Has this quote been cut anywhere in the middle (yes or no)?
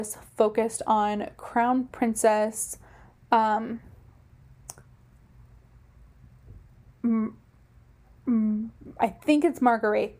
no